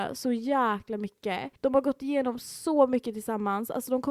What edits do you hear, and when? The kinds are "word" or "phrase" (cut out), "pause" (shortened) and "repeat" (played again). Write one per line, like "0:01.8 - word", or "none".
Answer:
0:01.6 - pause